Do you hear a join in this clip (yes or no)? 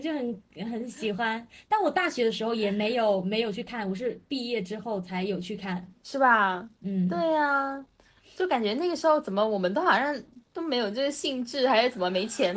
no